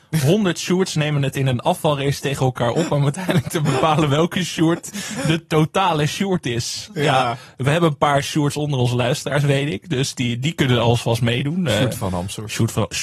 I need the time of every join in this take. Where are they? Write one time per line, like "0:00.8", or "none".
none